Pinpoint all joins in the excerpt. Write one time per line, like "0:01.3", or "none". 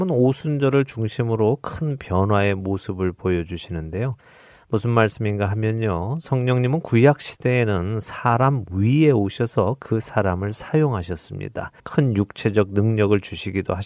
0:11.8